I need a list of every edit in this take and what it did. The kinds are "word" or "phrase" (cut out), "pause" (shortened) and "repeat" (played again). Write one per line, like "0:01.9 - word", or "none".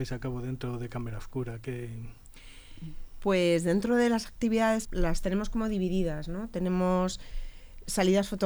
0:04.9 - phrase